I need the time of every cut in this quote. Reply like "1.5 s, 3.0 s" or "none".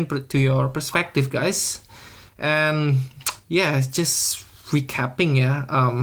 none